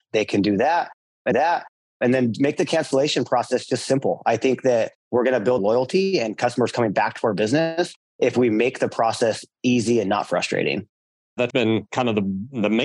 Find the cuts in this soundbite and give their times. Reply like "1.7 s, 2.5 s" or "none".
1.3 s, 5.0 s, 5.6 s, 11.5 s